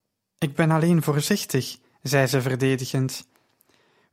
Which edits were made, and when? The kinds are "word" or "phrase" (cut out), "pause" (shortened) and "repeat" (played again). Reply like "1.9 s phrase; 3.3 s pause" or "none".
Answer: none